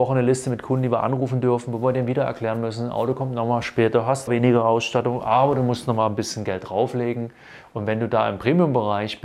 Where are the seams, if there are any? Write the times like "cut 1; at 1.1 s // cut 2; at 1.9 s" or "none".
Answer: cut 1; at 4.3 s